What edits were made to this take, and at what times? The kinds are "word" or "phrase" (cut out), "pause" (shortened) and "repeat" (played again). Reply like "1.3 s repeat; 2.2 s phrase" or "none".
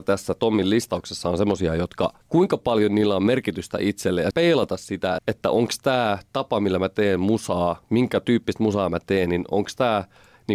2.2 s pause; 4.3 s phrase; 5.2 s word

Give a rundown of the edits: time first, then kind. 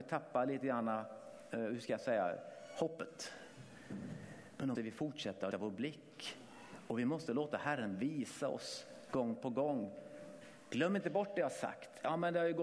4.7 s word; 5.5 s word

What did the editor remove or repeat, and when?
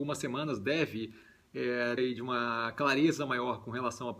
2.0 s word

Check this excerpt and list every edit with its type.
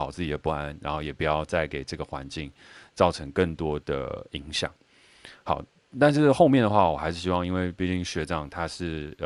none

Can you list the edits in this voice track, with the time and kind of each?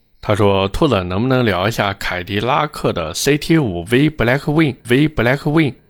4.8 s repeat

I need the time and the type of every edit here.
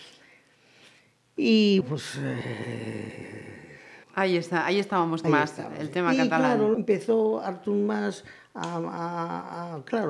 1.8 s word; 4.0 s pause; 5.2 s phrase; 6.7 s word

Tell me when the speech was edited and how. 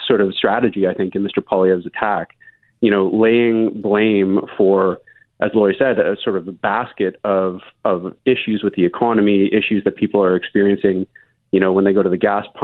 none

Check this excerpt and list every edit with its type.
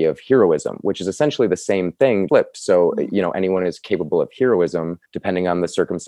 2.3 s word; 5.1 s pause

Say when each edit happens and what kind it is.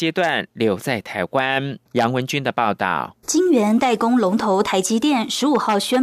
1.9 s pause; 3.2 s pause

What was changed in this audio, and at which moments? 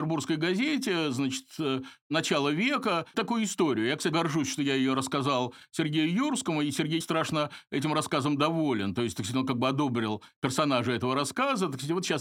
3.1 s word; 4.1 s word; 7.0 s phrase

